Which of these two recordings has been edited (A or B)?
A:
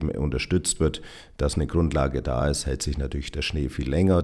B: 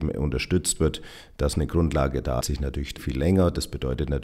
B